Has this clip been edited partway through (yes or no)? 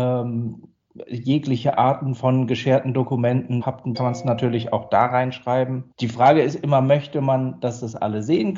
yes